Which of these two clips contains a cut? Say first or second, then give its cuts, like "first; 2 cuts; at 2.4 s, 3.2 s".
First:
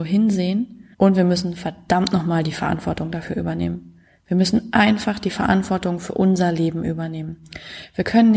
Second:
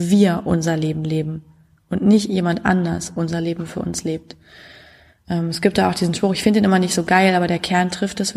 first; 2 cuts; at 0.9 s, 4.0 s